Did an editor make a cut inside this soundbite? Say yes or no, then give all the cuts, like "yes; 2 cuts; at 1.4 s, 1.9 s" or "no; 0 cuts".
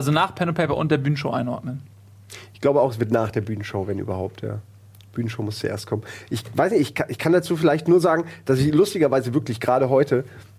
no; 0 cuts